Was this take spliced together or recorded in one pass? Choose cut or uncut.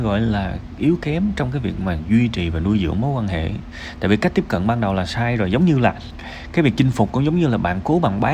uncut